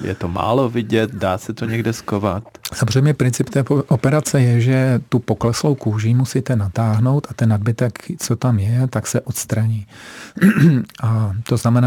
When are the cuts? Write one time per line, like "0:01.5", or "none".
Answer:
0:05.1